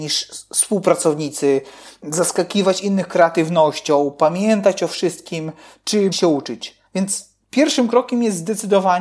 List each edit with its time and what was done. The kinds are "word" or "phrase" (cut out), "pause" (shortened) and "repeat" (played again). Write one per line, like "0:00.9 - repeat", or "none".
0:06.1 - word
0:06.9 - pause